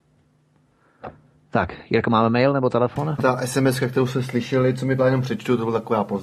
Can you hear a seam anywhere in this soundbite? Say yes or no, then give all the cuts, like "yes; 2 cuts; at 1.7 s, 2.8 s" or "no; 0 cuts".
yes; 2 cuts; at 3.2 s, 5.0 s